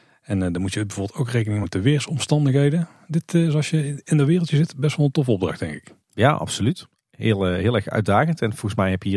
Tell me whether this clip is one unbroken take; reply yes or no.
no